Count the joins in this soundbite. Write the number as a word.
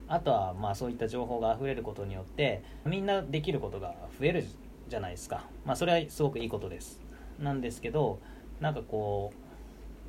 one